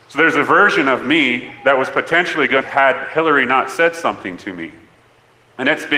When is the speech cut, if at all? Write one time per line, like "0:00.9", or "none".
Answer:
0:02.6

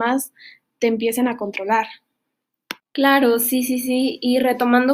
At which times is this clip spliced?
0:02.8

